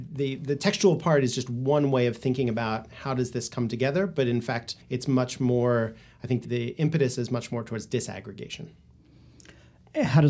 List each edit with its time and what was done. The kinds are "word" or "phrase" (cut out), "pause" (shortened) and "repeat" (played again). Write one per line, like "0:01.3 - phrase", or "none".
0:04.8 - pause
0:06.4 - word

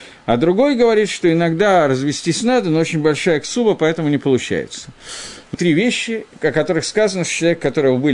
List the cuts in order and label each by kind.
0:05.5 - phrase

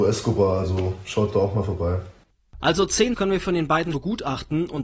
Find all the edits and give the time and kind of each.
0:03.1 - word
0:03.9 - word

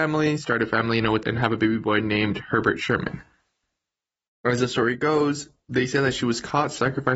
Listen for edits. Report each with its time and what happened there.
0:01.2 - word

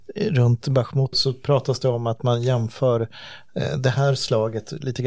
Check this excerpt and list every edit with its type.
0:01.1 - word

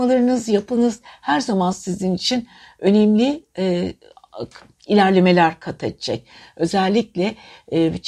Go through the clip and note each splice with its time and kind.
none

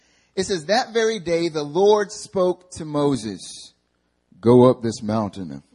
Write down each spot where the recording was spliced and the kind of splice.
none

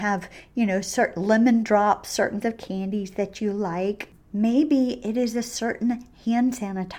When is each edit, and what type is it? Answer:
0:02.4 - word

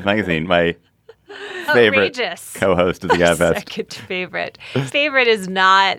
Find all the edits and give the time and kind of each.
0:01.7 - word
0:04.9 - word

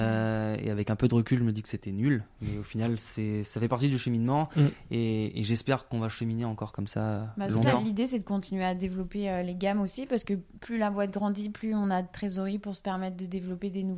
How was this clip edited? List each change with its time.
none

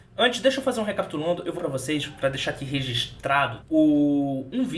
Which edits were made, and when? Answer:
0:01.6 - word
0:03.6 - word

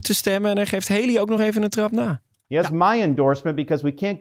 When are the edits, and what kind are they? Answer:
none

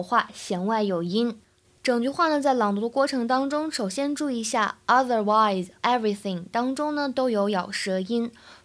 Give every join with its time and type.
0:05.8 - word

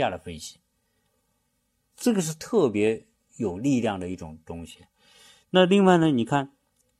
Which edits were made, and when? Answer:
none

